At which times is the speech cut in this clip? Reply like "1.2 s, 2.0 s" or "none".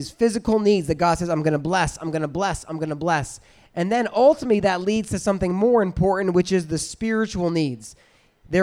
none